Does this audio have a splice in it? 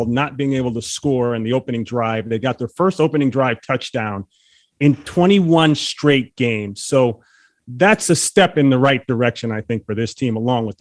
no; 0 cuts

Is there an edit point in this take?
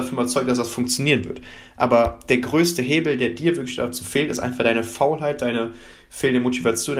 no; 0 cuts

